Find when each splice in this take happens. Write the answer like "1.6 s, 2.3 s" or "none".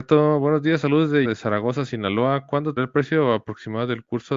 1.2 s, 2.8 s